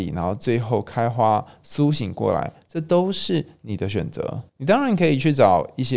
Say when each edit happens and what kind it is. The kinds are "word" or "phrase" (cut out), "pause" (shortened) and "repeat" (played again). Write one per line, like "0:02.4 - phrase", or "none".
0:04.5 - pause